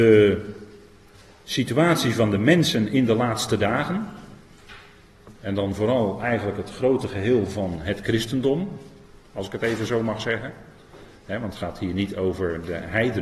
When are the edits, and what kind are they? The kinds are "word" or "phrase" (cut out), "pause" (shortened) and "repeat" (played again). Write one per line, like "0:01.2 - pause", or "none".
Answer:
0:05.4 - pause